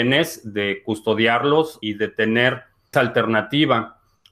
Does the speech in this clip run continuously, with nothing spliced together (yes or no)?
no